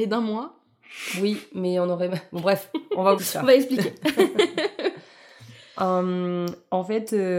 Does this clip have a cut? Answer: yes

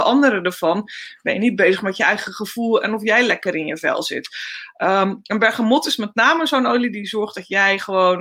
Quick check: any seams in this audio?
no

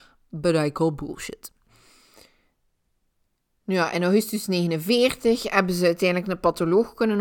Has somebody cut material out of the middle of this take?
no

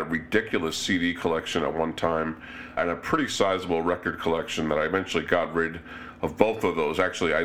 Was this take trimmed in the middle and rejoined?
yes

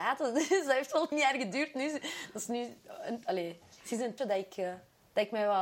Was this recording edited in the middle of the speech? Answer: yes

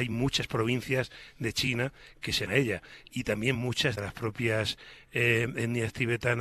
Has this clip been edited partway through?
yes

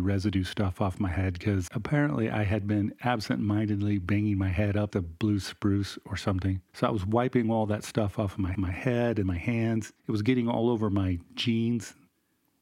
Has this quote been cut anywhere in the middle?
yes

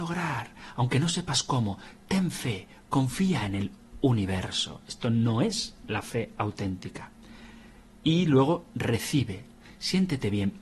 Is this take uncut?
yes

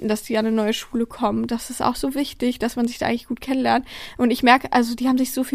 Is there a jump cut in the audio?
no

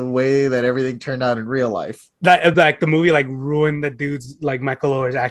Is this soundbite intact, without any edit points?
yes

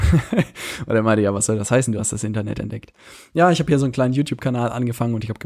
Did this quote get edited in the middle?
no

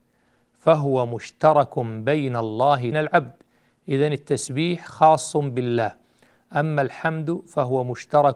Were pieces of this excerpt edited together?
yes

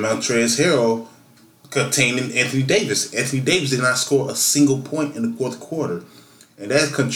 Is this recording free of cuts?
yes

